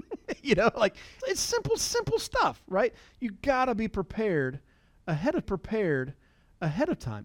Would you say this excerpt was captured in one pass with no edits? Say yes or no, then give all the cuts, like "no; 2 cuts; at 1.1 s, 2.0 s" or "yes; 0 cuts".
no; 3 cuts; at 1.2 s, 1.8 s, 5.4 s